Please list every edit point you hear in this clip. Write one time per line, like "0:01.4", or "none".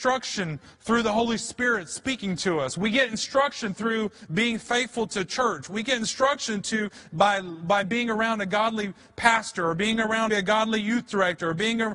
0:07.8
0:10.3